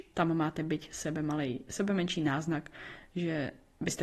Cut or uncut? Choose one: uncut